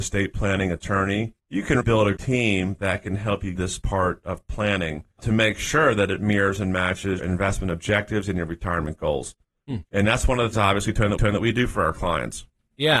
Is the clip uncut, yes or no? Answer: no